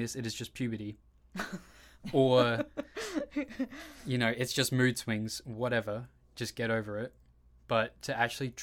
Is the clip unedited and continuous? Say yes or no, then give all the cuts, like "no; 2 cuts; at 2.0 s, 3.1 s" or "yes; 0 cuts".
yes; 0 cuts